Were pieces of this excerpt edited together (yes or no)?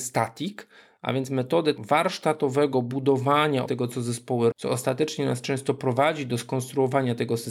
yes